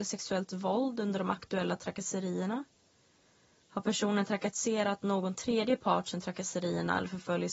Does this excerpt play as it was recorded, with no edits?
yes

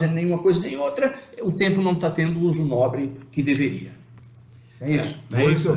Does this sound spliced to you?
no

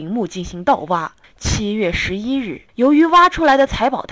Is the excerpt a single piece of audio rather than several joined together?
no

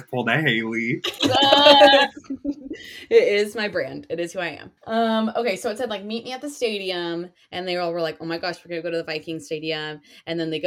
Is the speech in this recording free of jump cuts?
no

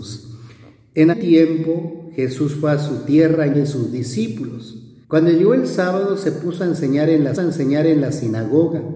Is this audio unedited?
no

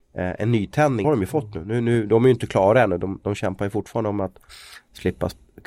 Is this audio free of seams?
no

